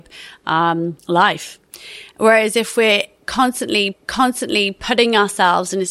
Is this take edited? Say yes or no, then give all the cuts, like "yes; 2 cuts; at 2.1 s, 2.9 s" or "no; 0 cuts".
yes; 2 cuts; at 1.0 s, 3.9 s